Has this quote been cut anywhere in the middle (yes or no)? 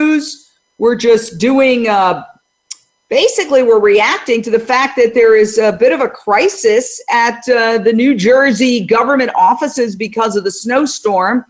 no